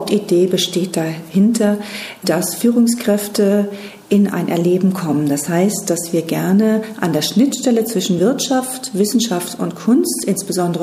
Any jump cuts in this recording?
no; 0 cuts

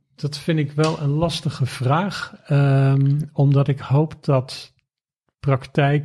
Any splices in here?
no; 0 cuts

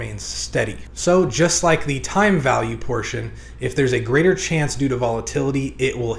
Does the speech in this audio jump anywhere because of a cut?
no; 0 cuts

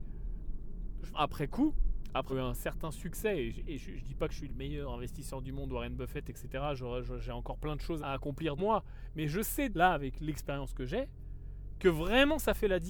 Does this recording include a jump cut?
yes; 6 cuts; at 1.1 s, 2.3 s, 4.5 s, 8.0 s, 8.6 s, 9.7 s

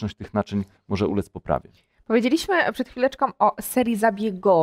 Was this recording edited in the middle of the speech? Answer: no; 0 cuts

